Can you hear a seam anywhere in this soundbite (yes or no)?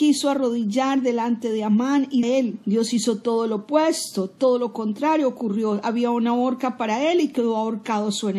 yes